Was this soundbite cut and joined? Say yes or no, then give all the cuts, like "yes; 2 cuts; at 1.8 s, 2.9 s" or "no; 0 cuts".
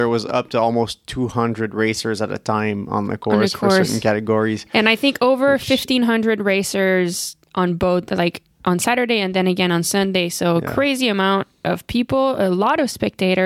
no; 0 cuts